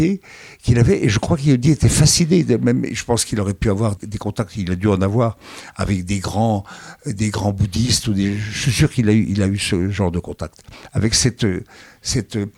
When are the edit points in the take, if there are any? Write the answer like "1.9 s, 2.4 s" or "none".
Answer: 4.0 s, 10.9 s